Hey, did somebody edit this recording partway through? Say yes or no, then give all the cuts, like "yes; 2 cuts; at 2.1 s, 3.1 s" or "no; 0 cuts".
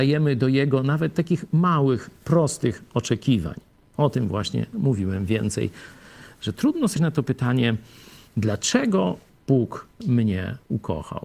yes; 1 cut; at 7.0 s